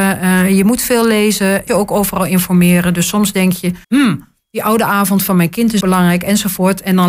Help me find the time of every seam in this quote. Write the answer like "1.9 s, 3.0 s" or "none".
1.7 s, 3.8 s, 5.8 s